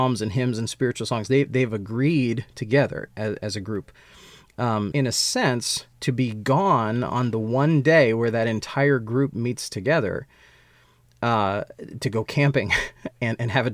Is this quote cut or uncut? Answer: cut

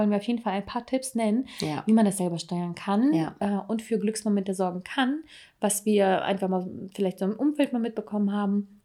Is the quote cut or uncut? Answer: uncut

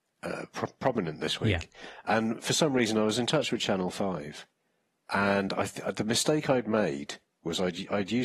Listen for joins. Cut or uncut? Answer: uncut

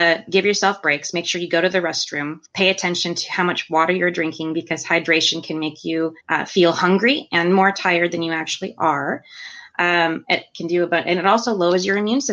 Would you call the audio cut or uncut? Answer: cut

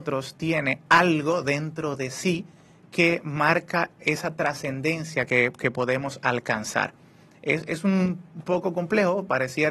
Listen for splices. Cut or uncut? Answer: uncut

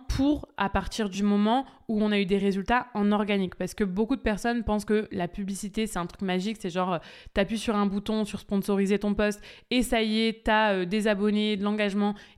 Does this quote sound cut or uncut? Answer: uncut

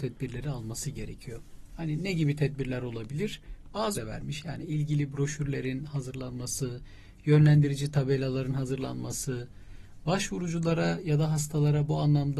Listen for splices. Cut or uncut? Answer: cut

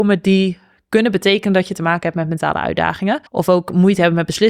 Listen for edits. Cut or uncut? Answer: cut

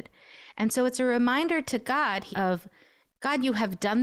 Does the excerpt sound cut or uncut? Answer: cut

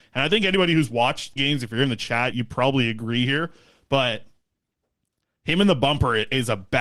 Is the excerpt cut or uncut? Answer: cut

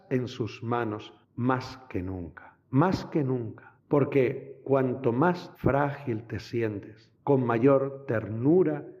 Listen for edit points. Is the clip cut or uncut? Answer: cut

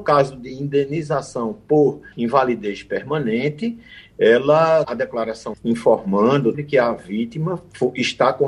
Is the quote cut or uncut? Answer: cut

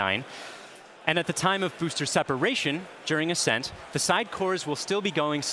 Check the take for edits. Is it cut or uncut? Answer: uncut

